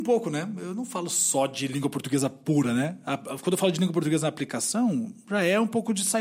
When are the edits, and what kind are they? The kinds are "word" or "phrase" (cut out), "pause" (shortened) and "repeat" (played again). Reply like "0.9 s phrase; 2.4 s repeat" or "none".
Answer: none